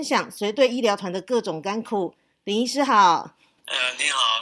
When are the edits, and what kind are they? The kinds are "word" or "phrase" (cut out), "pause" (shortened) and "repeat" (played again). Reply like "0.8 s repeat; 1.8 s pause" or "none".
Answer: none